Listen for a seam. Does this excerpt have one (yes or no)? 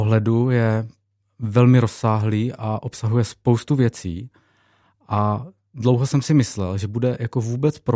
no